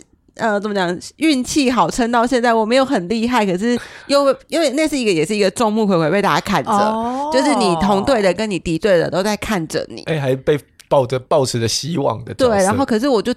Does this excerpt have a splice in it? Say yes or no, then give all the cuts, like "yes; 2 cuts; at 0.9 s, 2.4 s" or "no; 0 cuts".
no; 0 cuts